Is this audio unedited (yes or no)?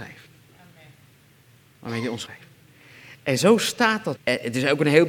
no